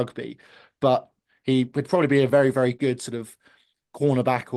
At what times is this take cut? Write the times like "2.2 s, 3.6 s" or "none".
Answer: none